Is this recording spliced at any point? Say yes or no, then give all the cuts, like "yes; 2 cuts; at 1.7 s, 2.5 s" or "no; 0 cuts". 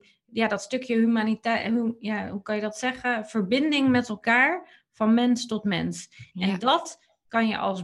no; 0 cuts